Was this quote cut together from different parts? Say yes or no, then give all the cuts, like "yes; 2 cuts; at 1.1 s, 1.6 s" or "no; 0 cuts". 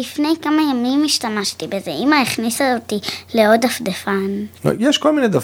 no; 0 cuts